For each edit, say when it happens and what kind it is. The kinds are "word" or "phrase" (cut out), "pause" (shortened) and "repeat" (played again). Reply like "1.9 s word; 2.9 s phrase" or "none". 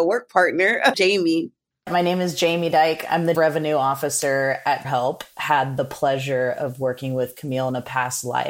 0.9 s word; 3.3 s word; 4.8 s word